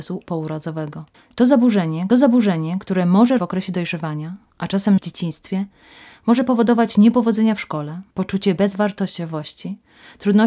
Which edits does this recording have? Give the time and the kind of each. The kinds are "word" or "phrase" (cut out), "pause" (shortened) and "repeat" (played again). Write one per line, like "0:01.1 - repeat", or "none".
0:01.1 - pause
0:02.1 - repeat
0:03.4 - phrase
0:05.0 - word
0:08.1 - pause